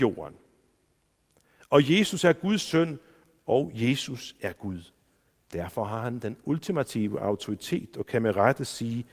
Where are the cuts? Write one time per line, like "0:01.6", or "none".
none